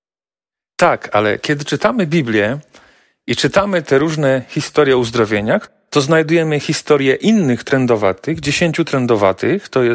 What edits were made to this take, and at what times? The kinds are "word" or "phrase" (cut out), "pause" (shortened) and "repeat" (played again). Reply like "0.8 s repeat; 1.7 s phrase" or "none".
none